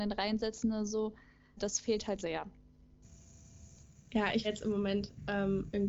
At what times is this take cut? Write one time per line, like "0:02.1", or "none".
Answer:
0:01.6
0:02.2
0:04.4